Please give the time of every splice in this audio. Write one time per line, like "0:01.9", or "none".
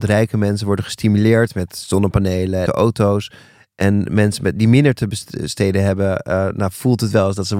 0:02.7